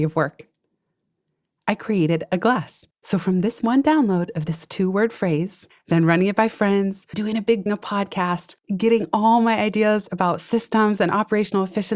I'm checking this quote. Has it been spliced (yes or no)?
yes